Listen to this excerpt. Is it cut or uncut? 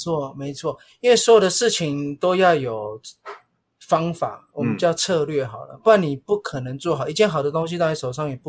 uncut